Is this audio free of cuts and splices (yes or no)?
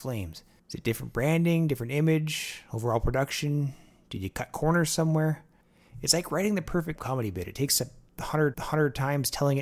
no